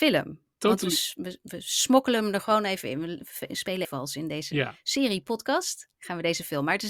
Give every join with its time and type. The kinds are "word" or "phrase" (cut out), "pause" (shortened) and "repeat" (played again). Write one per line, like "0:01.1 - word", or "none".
0:03.8 - word
0:05.9 - pause